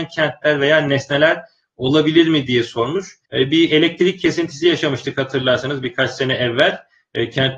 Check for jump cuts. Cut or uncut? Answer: cut